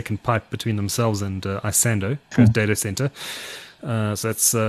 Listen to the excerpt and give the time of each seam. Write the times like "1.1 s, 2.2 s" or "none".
2.3 s

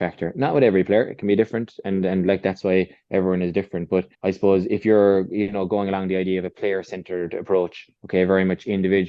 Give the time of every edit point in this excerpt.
4.1 s, 8.0 s

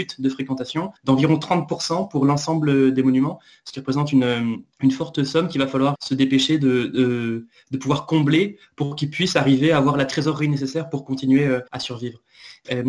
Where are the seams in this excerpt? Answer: 1.0 s, 4.7 s, 5.9 s, 11.7 s

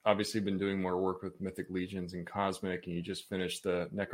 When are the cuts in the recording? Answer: none

